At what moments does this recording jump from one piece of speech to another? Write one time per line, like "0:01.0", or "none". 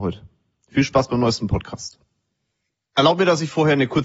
none

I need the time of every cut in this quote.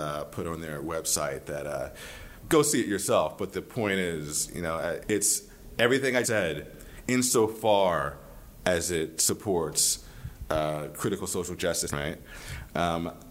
0:02.4
0:05.0
0:06.2
0:11.9

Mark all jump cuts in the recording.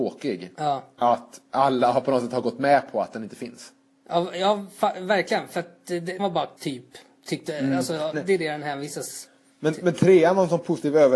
0:06.2
0:06.6
0:08.1

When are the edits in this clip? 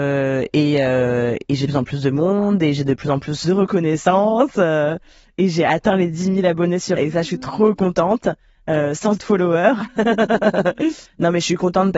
0:01.7
0:03.4
0:07.0
0:09.2

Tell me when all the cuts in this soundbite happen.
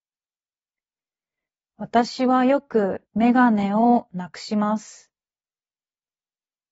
0:03.1

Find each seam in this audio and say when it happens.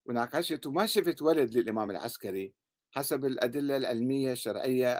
none

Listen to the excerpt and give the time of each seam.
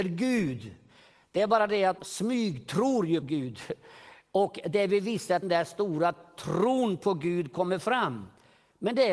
0:02.0
0:03.2
0:05.4

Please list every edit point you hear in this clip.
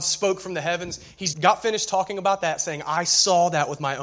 0:01.3

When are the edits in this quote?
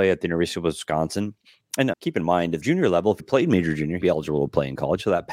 0:01.9
0:02.6
0:03.2
0:04.0

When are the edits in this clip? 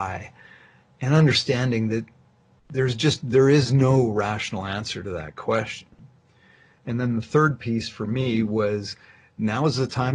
none

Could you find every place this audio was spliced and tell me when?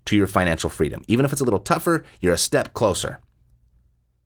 none

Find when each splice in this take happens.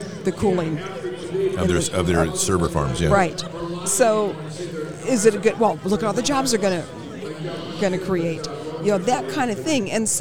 0:09.0

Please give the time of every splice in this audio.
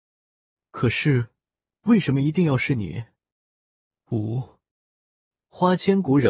none

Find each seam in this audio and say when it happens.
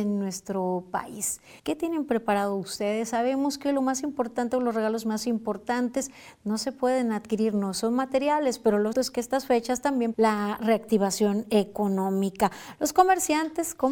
0:01.6
0:08.9
0:10.1

